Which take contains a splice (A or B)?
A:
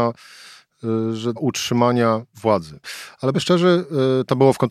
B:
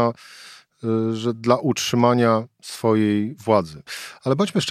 A